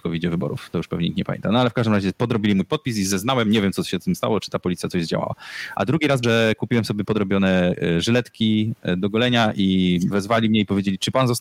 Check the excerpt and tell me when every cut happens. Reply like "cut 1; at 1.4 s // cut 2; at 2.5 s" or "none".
cut 1; at 6.2 s